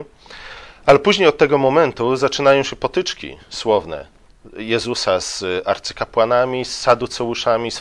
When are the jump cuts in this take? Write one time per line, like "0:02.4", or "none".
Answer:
none